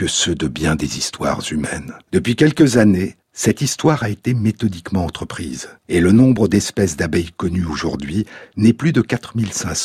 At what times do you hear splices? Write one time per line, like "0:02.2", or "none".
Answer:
0:02.0
0:03.2
0:05.8